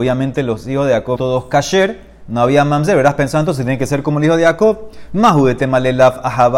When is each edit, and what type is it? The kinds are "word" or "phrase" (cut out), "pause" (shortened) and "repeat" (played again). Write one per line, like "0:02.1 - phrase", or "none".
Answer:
0:01.2 - word